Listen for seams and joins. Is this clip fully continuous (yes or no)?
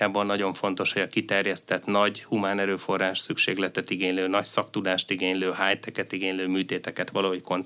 yes